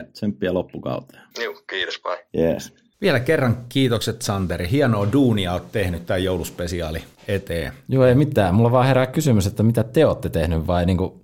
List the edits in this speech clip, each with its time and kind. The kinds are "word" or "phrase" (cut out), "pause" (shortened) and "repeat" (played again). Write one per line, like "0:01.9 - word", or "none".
0:01.3 - pause
0:02.3 - pause
0:02.9 - pause
0:07.1 - pause